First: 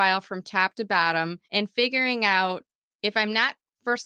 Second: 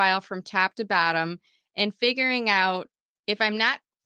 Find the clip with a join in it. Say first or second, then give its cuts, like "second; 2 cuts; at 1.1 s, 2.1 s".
first; 1 cut; at 1.4 s